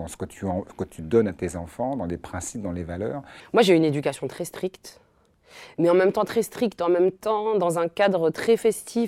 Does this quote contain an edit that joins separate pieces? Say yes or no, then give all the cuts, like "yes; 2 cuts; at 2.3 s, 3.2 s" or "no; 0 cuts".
no; 0 cuts